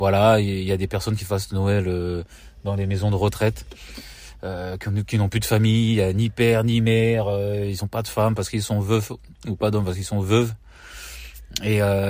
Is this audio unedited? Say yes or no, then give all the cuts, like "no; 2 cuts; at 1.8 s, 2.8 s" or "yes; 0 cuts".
yes; 0 cuts